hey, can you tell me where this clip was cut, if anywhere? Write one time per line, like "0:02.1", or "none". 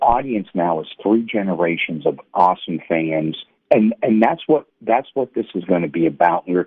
0:04.7